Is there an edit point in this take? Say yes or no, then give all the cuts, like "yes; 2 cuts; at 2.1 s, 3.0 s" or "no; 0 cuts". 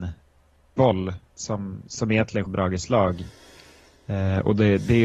yes; 1 cut; at 2.5 s